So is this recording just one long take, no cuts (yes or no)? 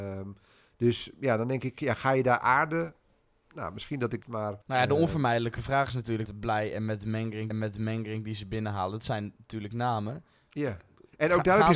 no